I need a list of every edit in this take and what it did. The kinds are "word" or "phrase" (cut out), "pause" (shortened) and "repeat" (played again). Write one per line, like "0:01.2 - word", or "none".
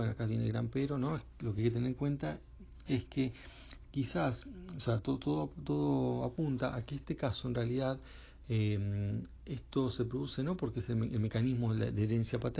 none